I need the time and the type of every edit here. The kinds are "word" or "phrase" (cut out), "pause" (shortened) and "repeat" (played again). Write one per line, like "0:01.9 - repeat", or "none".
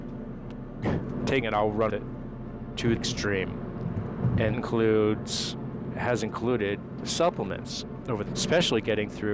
0:01.4 - word
0:01.9 - word
0:03.0 - word
0:04.5 - word
0:07.0 - word
0:08.3 - word